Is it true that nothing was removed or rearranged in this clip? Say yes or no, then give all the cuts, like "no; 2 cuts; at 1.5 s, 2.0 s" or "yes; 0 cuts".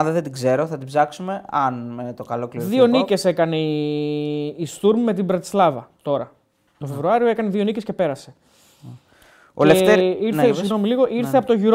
no; 1 cut; at 5.9 s